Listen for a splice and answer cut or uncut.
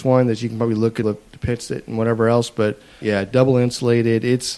cut